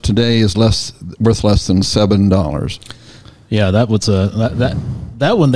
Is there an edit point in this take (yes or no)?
no